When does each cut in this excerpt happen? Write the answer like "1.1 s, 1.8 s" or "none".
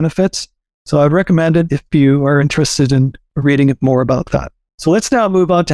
none